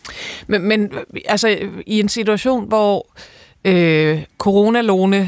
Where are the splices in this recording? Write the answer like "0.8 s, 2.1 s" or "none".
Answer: none